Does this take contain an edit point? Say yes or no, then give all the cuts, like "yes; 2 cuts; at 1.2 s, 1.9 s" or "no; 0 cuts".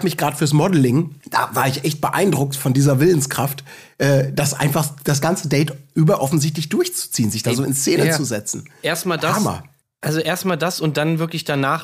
yes; 2 cuts; at 1.2 s, 9.8 s